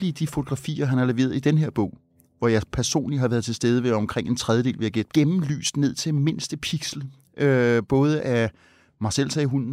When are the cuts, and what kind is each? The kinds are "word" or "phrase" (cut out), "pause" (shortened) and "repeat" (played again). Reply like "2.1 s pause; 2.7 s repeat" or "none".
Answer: 5.1 s phrase

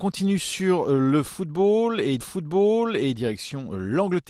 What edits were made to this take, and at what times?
2.2 s repeat

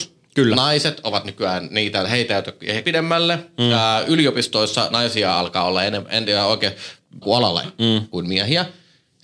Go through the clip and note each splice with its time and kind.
2.8 s word; 4.9 s word; 7.2 s word; 7.6 s word

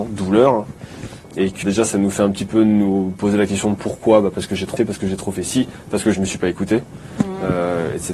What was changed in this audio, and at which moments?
1.6 s word; 4.8 s word

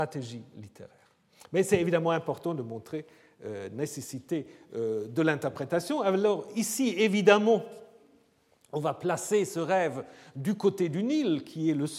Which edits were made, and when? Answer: none

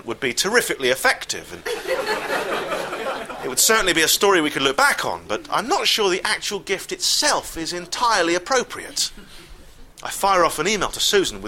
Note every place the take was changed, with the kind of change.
9.9 s pause

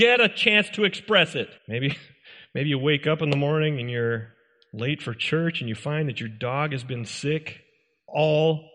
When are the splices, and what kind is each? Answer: 1.6 s pause

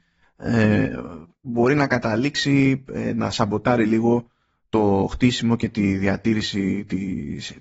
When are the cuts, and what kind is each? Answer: none

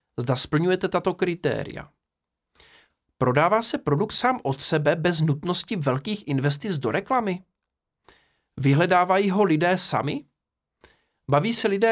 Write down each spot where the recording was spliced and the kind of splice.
none

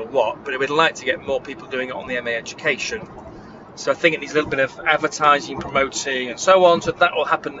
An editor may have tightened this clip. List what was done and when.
none

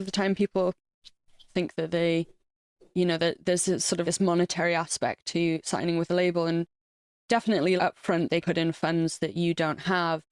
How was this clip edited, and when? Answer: 1.5 s word; 4.0 s word; 7.8 s word; 8.4 s word

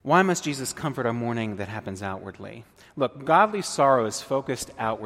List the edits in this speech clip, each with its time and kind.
none

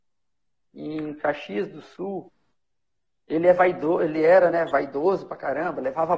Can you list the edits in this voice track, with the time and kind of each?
none

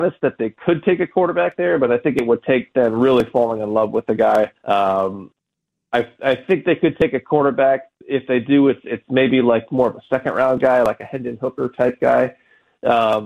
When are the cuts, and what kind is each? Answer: 4.6 s pause

